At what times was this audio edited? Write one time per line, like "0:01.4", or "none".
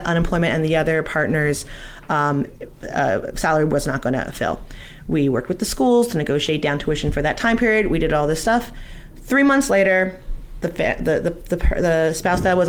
none